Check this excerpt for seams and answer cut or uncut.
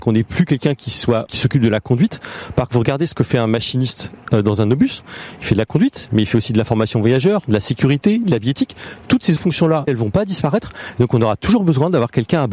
cut